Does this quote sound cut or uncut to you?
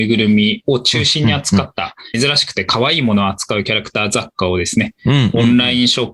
cut